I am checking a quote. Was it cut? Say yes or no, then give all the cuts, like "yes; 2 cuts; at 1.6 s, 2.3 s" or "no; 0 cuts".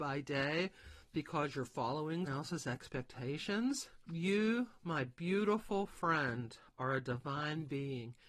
yes; 2 cuts; at 2.3 s, 4.0 s